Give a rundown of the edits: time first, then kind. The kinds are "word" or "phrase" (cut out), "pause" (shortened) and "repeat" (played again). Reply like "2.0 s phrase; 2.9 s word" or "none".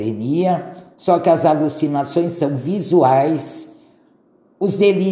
none